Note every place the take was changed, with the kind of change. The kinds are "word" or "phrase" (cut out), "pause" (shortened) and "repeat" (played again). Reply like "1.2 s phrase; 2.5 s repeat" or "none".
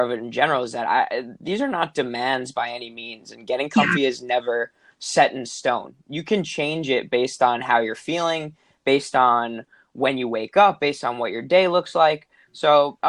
none